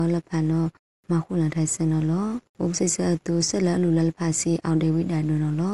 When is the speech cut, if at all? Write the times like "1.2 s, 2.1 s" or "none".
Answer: 2.5 s